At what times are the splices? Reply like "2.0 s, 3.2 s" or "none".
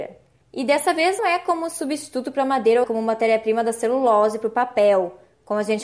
1.2 s, 2.8 s